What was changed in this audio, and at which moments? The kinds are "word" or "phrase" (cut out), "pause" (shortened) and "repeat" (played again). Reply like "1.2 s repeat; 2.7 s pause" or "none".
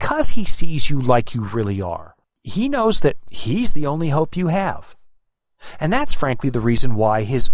2.2 s pause